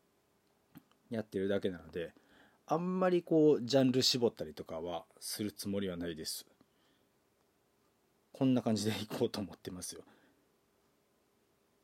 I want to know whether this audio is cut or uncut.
uncut